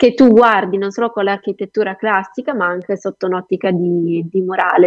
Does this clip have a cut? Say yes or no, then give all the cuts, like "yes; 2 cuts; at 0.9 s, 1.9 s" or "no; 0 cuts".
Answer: no; 0 cuts